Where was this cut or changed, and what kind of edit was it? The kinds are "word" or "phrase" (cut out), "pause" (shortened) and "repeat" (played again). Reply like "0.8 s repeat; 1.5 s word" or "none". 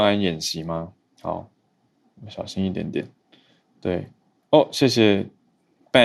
none